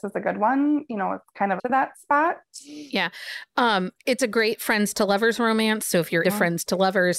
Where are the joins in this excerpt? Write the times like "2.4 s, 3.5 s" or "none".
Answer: 1.6 s, 3.9 s, 6.2 s